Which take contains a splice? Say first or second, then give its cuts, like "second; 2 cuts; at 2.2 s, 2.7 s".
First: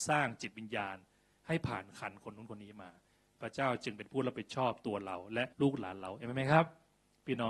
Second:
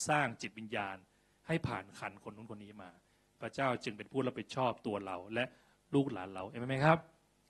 first; 1 cut; at 5.5 s